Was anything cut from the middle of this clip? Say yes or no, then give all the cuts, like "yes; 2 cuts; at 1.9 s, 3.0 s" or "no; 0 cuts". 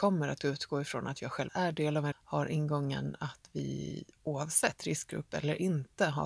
yes; 3 cuts; at 1.5 s, 2.1 s, 4.1 s